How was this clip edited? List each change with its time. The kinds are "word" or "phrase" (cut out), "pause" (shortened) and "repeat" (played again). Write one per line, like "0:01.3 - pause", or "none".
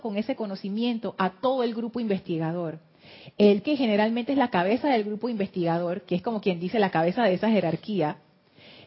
0:03.6 - word